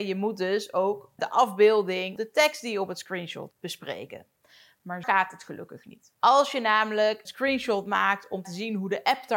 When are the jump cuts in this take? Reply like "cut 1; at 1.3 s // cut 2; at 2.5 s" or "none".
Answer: cut 1; at 1.2 s // cut 2; at 2.2 s // cut 3; at 3.5 s // cut 4; at 5.0 s // cut 5; at 7.2 s // cut 6; at 8.4 s